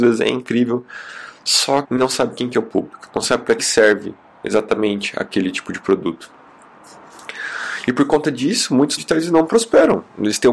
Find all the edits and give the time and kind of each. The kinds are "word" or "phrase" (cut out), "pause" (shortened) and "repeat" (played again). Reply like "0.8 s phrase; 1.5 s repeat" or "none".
1.8 s word; 3.6 s word; 9.0 s word

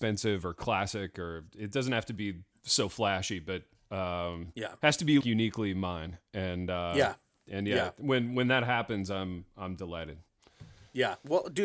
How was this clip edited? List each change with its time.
5.2 s word

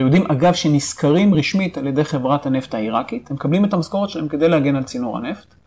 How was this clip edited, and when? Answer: none

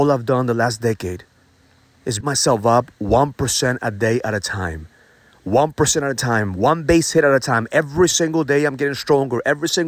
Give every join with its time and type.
2.2 s word

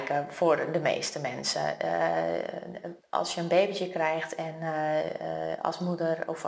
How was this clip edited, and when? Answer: 3.0 s pause

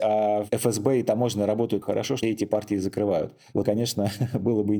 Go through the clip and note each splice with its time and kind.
1.8 s word; 2.2 s word; 3.6 s word

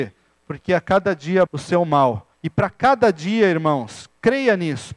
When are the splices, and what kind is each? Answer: 1.5 s word; 2.3 s pause

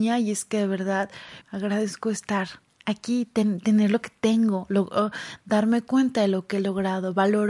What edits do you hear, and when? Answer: 1.4 s phrase; 2.7 s word

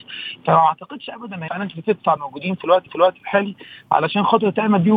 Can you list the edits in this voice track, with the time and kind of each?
1.5 s word; 2.2 s phrase; 2.9 s repeat

